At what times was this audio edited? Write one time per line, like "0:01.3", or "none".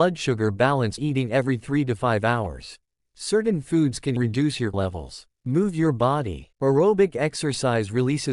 0:01.0
0:03.0
0:04.2
0:04.7
0:05.4
0:06.5